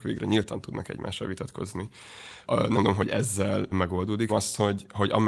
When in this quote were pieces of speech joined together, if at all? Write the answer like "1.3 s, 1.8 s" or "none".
2.4 s, 2.7 s, 3.7 s, 4.3 s